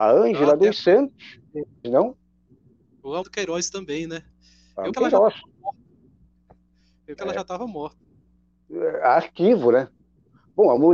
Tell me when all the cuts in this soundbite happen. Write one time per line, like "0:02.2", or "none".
0:01.8
0:03.2
0:04.9
0:07.2